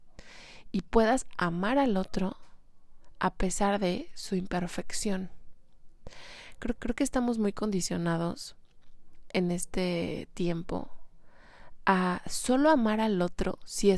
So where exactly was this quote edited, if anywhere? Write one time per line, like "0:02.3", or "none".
0:06.8